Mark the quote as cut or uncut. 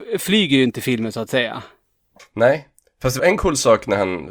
cut